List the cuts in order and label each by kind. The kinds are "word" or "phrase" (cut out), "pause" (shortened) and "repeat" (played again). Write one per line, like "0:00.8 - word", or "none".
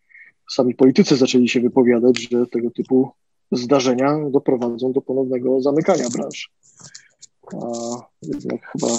none